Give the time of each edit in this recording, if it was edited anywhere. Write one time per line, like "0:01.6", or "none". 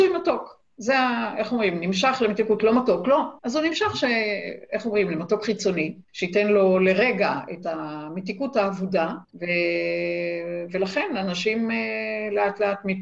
0:03.4
0:06.0
0:09.2